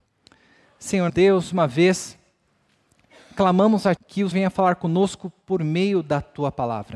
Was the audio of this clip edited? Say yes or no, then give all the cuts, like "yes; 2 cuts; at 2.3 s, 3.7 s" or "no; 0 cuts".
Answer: yes; 4 cuts; at 1.1 s, 1.5 s, 4.0 s, 4.3 s